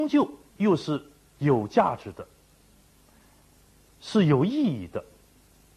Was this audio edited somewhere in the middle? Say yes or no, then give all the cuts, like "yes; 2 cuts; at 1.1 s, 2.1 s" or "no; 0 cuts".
no; 0 cuts